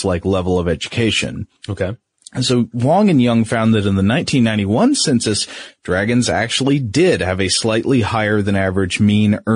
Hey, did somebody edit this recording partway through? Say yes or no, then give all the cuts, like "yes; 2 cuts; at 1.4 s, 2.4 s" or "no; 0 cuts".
no; 0 cuts